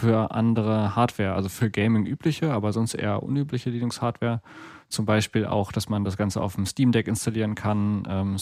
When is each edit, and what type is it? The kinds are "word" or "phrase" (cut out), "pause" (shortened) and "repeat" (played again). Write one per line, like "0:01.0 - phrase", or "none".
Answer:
none